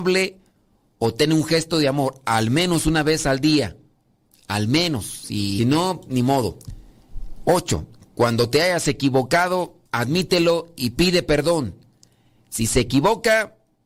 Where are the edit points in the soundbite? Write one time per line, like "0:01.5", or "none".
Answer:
0:05.6
0:09.9